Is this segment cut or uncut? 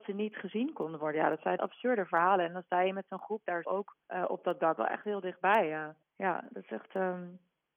cut